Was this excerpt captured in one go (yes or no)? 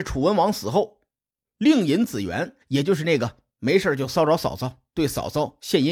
no